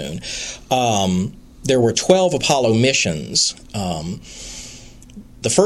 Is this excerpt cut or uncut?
uncut